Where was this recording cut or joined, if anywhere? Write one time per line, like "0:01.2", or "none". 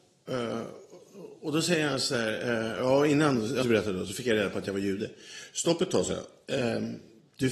0:03.6